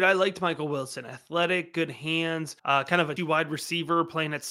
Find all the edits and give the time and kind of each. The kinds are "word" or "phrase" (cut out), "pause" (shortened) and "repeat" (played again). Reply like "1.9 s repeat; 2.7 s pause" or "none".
2.6 s pause; 3.2 s word